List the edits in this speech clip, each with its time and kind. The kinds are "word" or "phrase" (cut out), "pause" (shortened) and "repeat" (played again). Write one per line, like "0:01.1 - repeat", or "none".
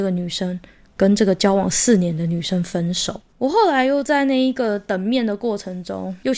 0:03.3 - pause